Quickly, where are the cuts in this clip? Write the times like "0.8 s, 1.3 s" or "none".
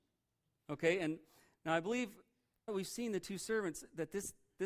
2.7 s